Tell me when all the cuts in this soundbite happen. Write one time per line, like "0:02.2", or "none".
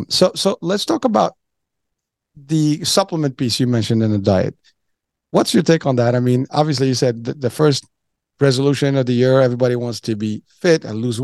none